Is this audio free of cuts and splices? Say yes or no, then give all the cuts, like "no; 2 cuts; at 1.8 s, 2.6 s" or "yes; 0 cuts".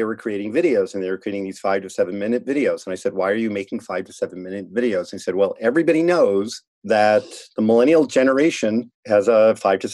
no; 1 cut; at 8.9 s